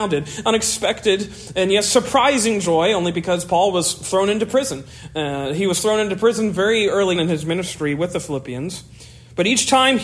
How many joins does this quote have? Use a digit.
1